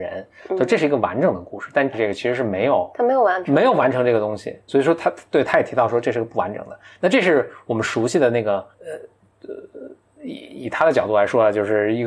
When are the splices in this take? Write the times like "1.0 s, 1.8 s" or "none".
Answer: 1.9 s, 2.9 s, 4.7 s, 8.7 s